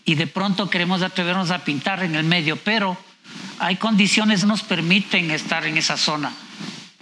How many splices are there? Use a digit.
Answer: 1